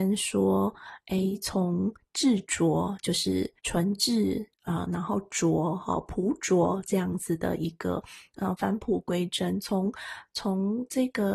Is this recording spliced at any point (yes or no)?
yes